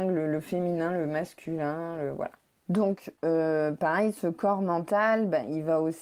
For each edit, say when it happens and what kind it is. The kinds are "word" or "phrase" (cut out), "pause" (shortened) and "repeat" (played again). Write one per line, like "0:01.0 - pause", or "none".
none

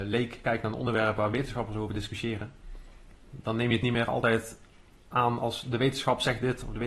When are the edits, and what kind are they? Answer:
none

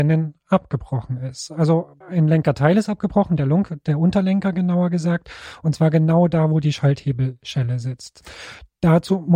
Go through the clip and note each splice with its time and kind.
0:02.0 - pause

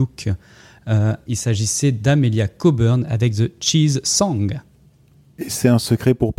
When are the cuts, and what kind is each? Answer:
0:01.3 - word

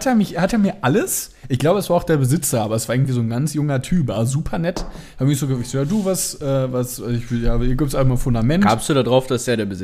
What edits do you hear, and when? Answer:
none

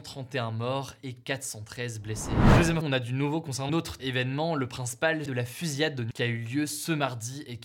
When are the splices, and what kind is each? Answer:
0:02.8 - word
0:03.7 - word
0:04.0 - word
0:05.3 - word
0:06.1 - word

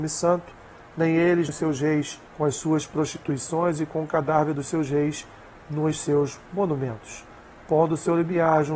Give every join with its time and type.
0:01.5 - word
0:02.3 - pause

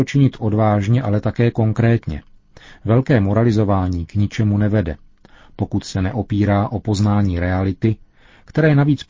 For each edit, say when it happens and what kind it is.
none

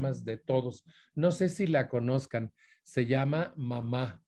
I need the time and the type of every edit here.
none

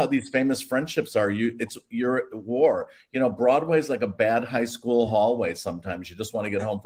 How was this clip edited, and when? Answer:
none

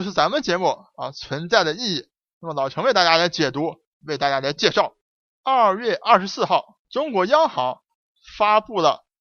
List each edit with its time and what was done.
0:06.8 - pause

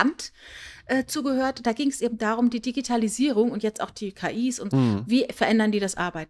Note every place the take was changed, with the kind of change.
0:04.7 - word

